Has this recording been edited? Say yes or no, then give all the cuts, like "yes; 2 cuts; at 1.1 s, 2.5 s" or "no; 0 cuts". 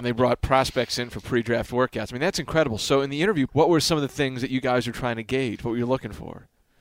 yes; 1 cut; at 3.5 s